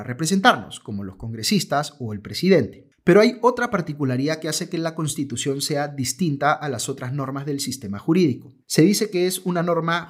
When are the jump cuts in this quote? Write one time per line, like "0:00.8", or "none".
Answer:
0:08.6